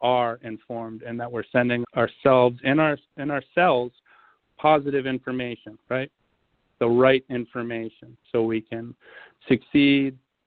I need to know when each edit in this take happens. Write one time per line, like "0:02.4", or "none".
0:01.8
0:08.2